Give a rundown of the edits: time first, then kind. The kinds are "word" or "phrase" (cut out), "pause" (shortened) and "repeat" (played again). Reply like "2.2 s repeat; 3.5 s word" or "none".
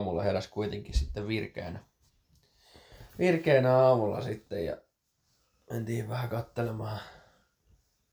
none